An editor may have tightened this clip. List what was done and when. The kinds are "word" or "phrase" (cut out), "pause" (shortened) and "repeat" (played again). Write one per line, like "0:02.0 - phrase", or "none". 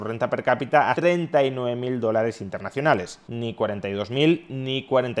0:00.9 - word
0:03.2 - pause